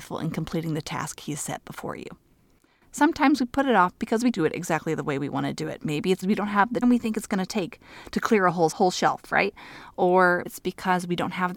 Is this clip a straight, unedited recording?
no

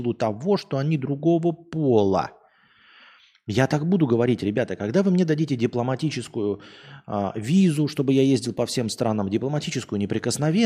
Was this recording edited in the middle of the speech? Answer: no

